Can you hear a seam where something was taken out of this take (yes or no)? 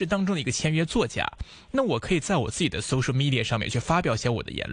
no